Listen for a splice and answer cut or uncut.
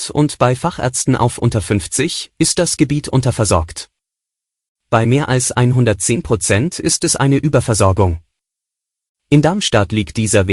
uncut